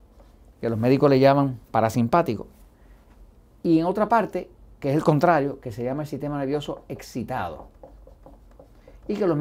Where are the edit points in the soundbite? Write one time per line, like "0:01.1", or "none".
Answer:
none